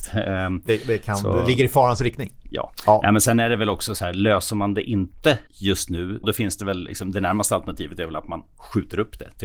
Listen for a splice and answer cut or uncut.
cut